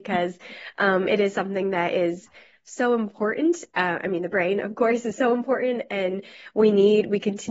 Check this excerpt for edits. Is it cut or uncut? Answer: uncut